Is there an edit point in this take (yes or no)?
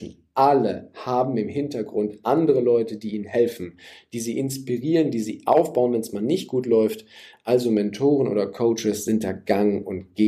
no